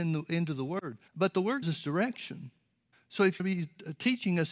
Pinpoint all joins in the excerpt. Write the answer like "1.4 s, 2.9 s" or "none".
1.1 s, 1.6 s, 2.9 s, 3.4 s